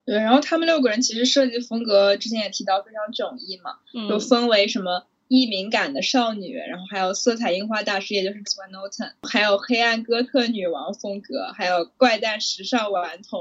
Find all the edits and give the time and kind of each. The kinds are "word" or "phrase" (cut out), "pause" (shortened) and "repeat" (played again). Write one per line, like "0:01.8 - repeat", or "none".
0:08.5 - word

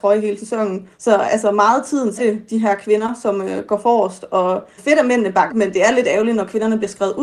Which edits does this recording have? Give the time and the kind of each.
0:00.9 - pause
0:02.2 - word
0:04.8 - word
0:05.5 - word

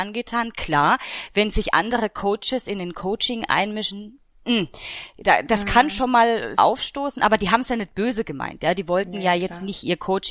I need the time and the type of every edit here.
0:06.6 - word

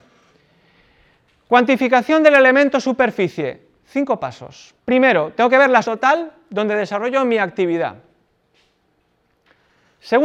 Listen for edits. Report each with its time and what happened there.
0:04.8 - pause
0:05.8 - word

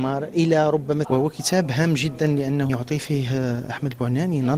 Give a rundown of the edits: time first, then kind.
0:01.0 - word
0:02.7 - word

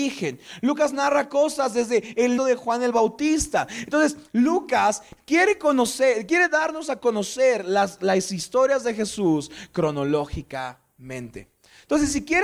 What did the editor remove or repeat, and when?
0:02.4 - word

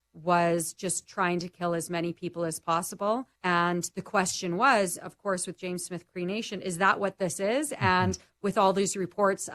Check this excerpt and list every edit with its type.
0:03.4 - pause

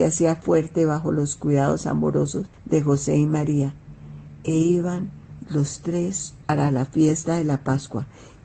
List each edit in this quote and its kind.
0:02.5 - pause
0:06.4 - phrase

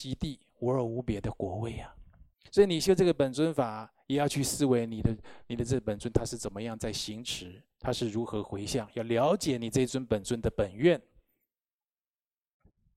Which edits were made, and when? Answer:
0:02.3 - pause

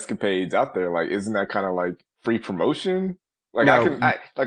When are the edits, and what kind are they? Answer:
0:02.1 - pause

